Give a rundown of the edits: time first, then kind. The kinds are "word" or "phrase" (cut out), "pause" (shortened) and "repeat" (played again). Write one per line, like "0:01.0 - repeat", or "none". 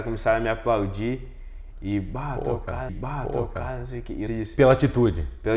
0:02.9 - repeat
0:04.3 - phrase